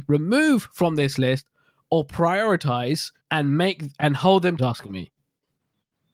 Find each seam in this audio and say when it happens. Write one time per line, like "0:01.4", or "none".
0:03.2
0:04.6